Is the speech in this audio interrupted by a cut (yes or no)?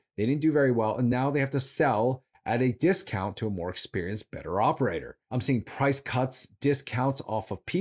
no